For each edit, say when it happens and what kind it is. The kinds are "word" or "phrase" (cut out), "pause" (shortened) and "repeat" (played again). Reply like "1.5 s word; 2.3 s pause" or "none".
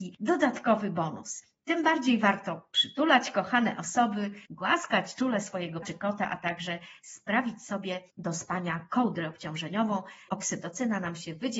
4.5 s pause; 5.8 s word; 10.3 s word